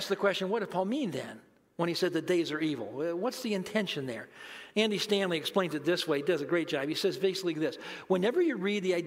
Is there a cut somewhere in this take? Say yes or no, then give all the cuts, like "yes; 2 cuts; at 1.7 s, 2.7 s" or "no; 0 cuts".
no; 0 cuts